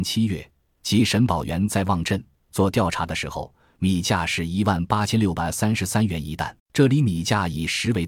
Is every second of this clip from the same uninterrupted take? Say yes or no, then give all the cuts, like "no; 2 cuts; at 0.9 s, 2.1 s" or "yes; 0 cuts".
no; 1 cut; at 6.6 s